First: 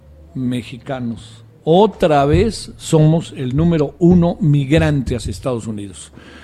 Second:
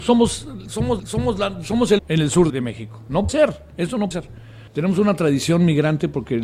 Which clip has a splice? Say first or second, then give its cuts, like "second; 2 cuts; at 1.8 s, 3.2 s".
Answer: second; 6 cuts; at 1.0 s, 2.0 s, 2.5 s, 3.3 s, 4.1 s, 4.7 s